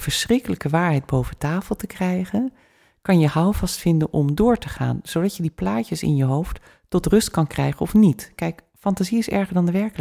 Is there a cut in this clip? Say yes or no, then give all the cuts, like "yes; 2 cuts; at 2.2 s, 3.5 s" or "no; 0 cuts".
no; 0 cuts